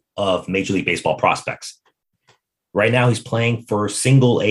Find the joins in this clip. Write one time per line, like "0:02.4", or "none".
none